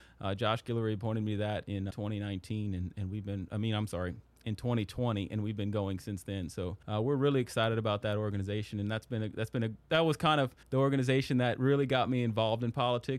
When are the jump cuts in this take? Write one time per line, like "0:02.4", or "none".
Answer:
0:01.9
0:06.8
0:10.6